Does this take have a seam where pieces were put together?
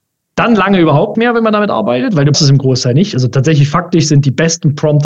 yes; 2 cuts; at 1.1 s, 2.3 s

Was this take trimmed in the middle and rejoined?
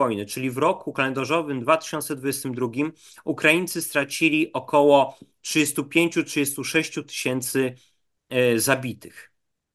no; 0 cuts

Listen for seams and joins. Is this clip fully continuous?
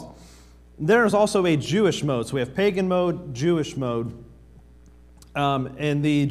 yes; 0 cuts

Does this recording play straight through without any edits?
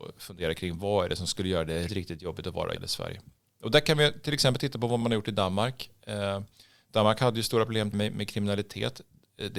no; 4 cuts; at 1.9 s, 2.8 s, 5.0 s, 7.9 s

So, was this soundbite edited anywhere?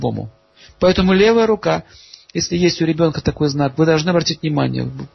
no; 0 cuts

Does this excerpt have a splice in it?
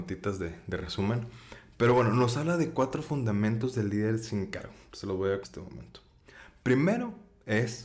yes; 1 cut; at 5.4 s

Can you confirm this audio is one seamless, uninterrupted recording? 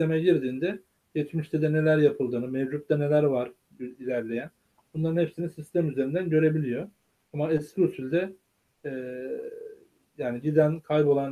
yes; 0 cuts

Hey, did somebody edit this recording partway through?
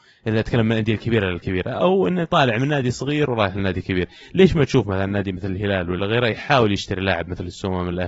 yes; 1 cut; at 6.0 s

